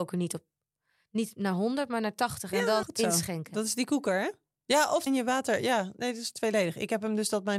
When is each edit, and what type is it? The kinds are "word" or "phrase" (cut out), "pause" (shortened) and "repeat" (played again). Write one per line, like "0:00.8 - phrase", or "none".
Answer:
0:02.8 - word
0:05.1 - phrase